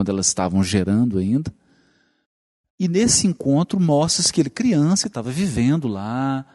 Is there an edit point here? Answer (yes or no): no